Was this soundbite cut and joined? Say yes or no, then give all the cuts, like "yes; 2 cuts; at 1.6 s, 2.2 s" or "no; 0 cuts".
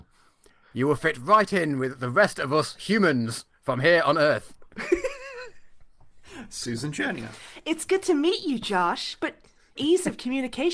yes; 1 cut; at 9.8 s